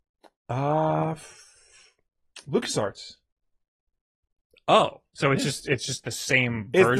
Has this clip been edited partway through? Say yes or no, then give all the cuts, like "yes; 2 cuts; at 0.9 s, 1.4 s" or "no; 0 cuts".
no; 0 cuts